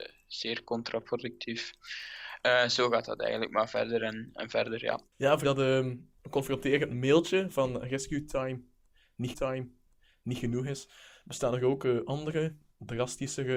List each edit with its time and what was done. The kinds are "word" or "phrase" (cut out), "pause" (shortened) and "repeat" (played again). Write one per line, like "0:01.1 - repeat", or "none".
0:05.1 - pause
0:05.4 - word
0:09.3 - repeat